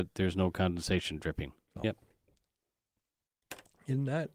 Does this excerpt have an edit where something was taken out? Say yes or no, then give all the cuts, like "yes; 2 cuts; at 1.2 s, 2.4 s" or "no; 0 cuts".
no; 0 cuts